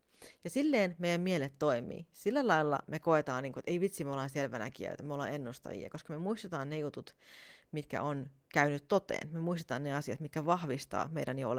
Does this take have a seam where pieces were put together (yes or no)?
no